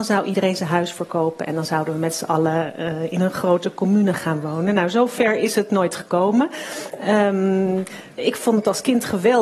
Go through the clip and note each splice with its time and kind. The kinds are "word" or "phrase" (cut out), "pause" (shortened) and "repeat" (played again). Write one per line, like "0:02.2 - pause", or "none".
none

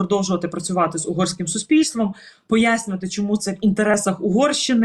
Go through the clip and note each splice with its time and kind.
none

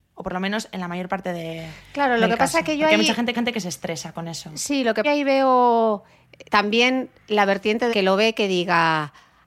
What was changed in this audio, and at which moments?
0:03.3 - repeat
0:05.0 - phrase
0:06.5 - pause
0:07.9 - word

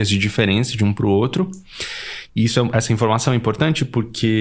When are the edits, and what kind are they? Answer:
none

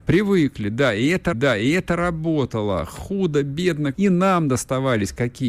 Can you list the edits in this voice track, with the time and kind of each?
0:01.3 - repeat
0:03.9 - word

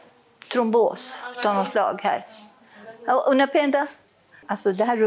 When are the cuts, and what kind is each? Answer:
none

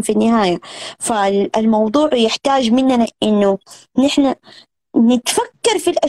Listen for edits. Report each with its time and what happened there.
none

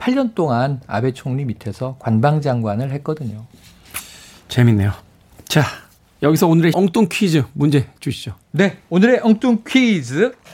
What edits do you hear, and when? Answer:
0:06.7 - word

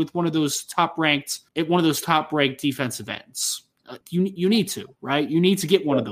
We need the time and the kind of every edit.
0:01.5 - pause
0:04.0 - pause

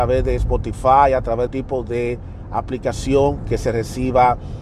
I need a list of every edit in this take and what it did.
0:01.5 - phrase

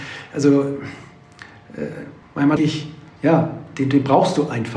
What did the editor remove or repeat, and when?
0:02.2 - word
0:02.6 - word
0:03.2 - word

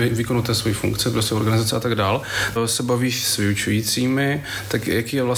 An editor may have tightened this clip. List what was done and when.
0:02.6 - word

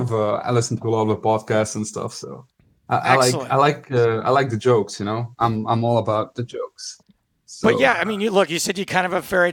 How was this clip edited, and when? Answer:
none

